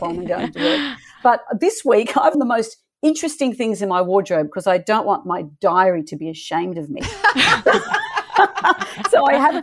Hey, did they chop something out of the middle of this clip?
yes; 1 cut; at 2.3 s

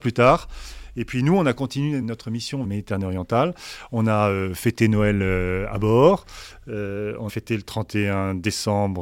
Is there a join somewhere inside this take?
yes; 3 cuts; at 2.0 s, 2.6 s, 7.3 s

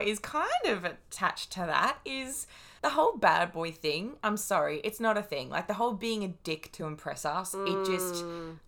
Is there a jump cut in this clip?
no; 0 cuts

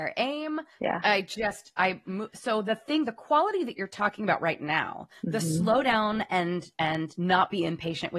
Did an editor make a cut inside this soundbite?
no; 0 cuts

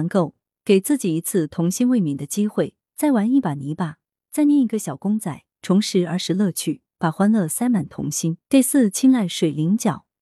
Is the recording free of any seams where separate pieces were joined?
no; 1 cut; at 8.4 s

